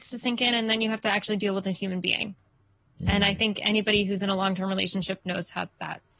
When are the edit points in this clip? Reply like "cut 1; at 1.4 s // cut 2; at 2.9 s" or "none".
none

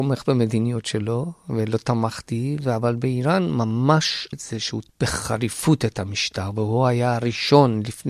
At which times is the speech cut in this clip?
cut 1; at 4.3 s // cut 2; at 4.9 s

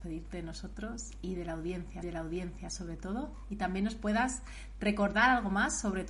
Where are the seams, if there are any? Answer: cut 1; at 2.0 s

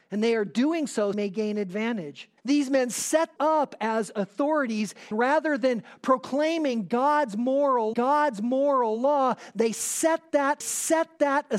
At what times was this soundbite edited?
cut 1; at 1.1 s // cut 2; at 2.4 s // cut 3; at 3.4 s // cut 4; at 5.1 s // cut 5; at 7.9 s // cut 6; at 10.6 s

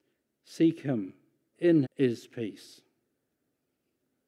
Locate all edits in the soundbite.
cut 1; at 1.5 s // cut 2; at 1.8 s

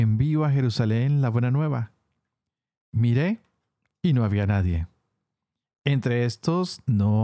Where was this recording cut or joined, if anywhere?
none

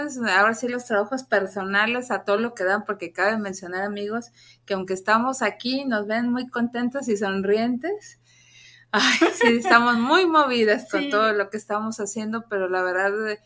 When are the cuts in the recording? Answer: none

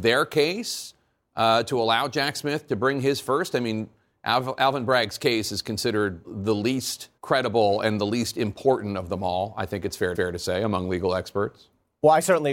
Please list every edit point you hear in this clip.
cut 1; at 6.2 s // cut 2; at 7.2 s // cut 3; at 10.1 s

